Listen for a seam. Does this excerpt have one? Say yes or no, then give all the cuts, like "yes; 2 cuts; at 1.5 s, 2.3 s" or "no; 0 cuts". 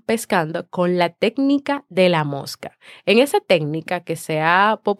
no; 0 cuts